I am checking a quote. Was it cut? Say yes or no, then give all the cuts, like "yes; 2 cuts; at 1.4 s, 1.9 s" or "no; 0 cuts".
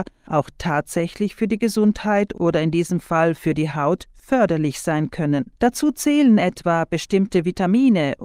yes; 1 cut; at 5.6 s